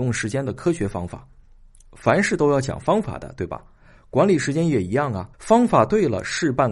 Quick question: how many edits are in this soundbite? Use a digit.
1